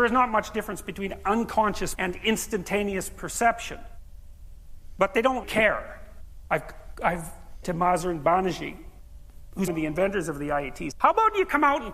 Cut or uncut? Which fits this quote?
cut